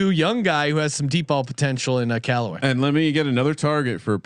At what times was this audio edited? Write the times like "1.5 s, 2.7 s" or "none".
none